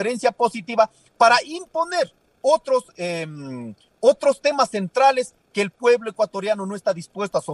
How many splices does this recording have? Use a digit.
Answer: 0